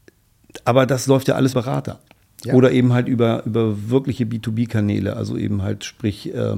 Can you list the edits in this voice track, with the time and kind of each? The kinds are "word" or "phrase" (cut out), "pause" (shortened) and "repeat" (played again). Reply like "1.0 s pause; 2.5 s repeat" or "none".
1.5 s word